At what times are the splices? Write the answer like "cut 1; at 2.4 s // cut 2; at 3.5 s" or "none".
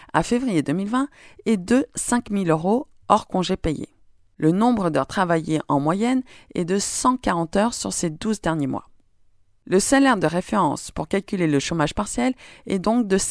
none